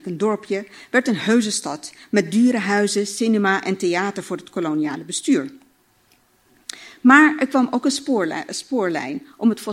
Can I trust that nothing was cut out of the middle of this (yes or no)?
yes